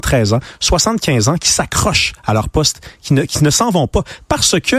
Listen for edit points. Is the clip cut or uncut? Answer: uncut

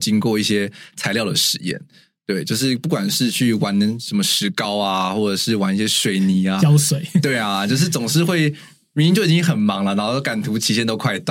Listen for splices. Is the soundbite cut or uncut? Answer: uncut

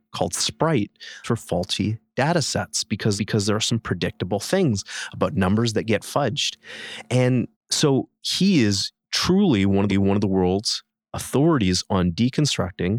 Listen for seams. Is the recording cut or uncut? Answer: cut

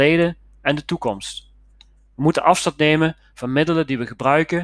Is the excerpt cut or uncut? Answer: uncut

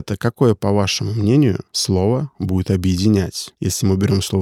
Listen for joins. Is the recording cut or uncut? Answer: uncut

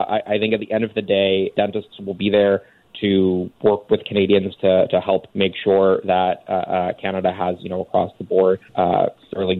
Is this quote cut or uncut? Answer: cut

